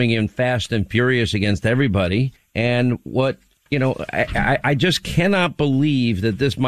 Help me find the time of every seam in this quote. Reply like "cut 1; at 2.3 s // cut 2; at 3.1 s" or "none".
none